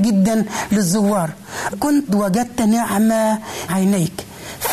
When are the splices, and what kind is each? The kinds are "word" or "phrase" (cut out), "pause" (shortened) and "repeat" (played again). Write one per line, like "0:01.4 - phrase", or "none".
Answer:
0:01.7 - word
0:02.1 - word
0:03.7 - word